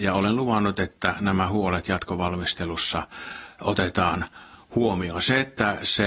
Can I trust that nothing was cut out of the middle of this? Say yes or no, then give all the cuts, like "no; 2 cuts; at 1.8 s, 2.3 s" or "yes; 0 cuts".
yes; 0 cuts